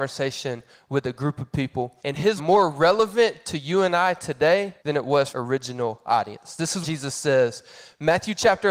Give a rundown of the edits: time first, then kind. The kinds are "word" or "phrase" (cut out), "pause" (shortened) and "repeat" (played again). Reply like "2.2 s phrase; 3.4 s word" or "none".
2.0 s pause; 2.4 s phrase; 4.8 s pause; 5.3 s phrase; 6.8 s word